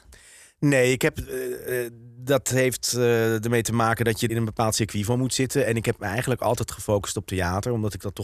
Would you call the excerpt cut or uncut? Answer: cut